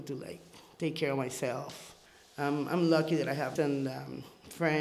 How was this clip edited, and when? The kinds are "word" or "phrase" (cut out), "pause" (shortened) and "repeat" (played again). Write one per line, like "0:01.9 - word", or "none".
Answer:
0:02.1 - pause
0:03.6 - phrase

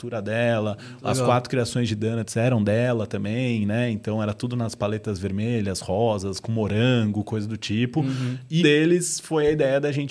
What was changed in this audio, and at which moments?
0:08.6 - word

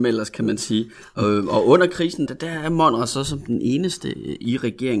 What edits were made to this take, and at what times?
0:02.3 - word

